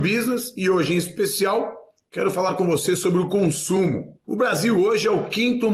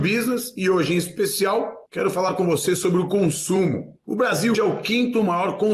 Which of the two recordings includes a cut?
second; 2 cuts; at 1.9 s, 4.5 s

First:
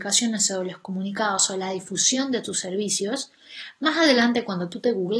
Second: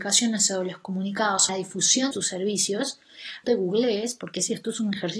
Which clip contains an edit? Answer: second; 3 cuts; at 1.5 s, 2.1 s, 3.4 s

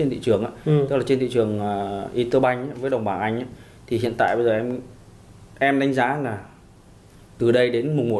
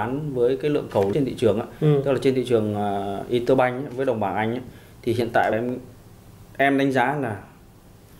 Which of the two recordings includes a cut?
second; 2 cuts; at 1.1 s, 5.5 s

